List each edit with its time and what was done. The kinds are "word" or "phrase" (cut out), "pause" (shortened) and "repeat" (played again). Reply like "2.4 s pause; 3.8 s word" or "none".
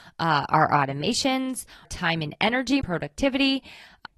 1.8 s word; 2.8 s word